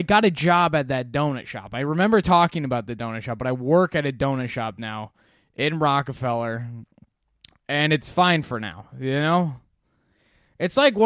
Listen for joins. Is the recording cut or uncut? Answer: uncut